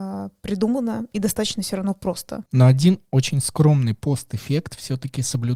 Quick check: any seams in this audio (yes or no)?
yes